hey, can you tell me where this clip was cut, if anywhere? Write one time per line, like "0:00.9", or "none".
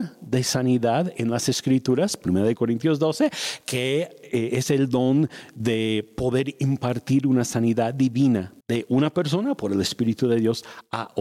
0:08.6